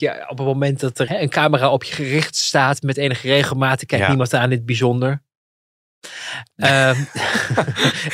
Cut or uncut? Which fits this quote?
cut